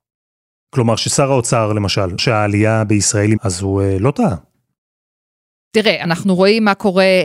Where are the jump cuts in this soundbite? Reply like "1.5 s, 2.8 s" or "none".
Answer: 2.2 s, 3.4 s